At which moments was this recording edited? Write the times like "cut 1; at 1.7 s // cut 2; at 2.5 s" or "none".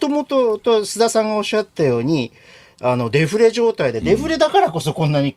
none